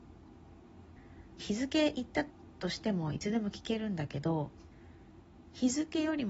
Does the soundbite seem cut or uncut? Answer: cut